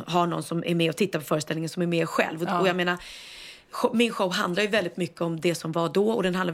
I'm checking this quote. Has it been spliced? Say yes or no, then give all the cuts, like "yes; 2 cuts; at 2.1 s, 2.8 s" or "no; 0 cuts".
no; 0 cuts